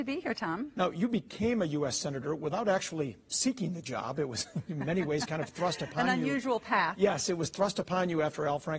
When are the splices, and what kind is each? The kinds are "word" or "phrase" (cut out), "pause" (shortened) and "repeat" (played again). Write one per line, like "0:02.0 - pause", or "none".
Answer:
none